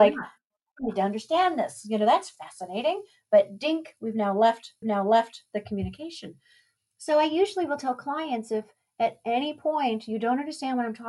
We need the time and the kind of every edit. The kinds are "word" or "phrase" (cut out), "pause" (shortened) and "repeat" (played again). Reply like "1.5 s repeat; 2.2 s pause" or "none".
4.8 s repeat